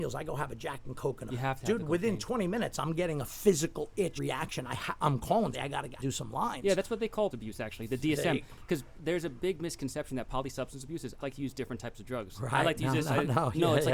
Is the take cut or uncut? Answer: cut